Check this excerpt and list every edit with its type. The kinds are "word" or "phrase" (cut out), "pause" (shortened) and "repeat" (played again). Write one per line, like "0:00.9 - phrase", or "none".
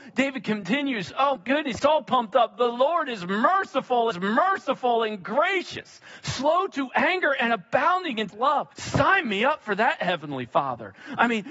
0:01.4 - word
0:01.8 - word
0:04.1 - repeat
0:08.3 - word
0:08.7 - pause

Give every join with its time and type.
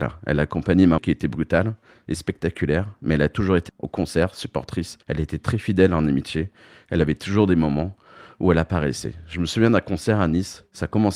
0:01.0 - word
0:03.7 - word
0:05.0 - pause

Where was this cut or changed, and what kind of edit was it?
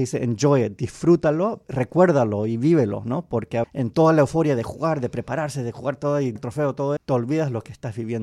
0:01.6 - word
0:03.6 - word
0:06.4 - word
0:07.0 - word

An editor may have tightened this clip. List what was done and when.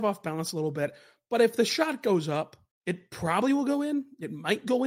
0:02.7 - pause

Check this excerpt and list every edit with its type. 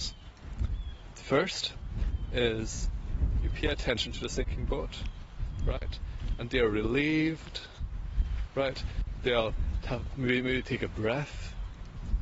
none

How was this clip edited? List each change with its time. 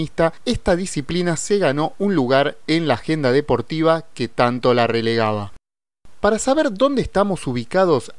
none

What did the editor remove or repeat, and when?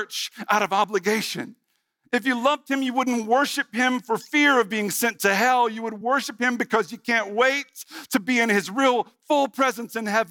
none

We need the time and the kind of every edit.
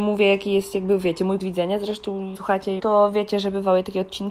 0:01.4 - word
0:02.3 - phrase
0:02.8 - phrase

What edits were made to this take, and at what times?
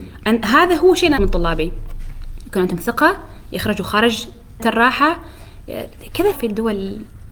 0:01.2 - word
0:04.6 - word
0:06.3 - word

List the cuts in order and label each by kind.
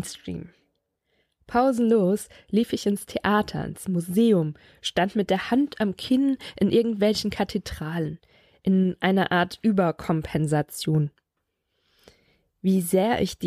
none

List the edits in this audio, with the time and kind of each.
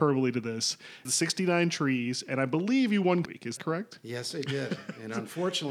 0:01.0 - phrase
0:03.2 - word
0:03.6 - word

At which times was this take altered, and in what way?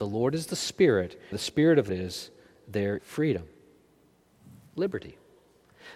0:01.3 - phrase
0:01.9 - word
0:03.0 - word

